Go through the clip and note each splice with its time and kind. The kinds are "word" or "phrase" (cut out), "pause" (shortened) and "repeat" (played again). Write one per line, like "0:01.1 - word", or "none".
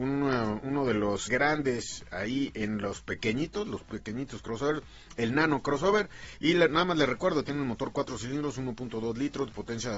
0:01.3 - word